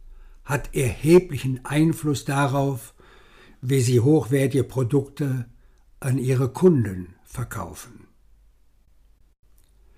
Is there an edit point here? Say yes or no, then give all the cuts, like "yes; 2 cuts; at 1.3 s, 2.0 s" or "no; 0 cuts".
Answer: no; 0 cuts